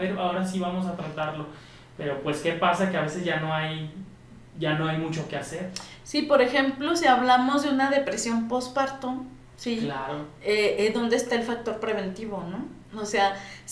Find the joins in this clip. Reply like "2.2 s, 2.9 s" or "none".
none